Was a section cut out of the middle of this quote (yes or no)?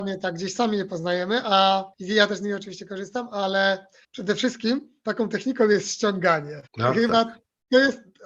yes